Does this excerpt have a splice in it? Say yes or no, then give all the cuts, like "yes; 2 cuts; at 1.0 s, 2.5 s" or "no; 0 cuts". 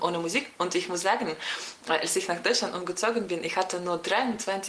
no; 0 cuts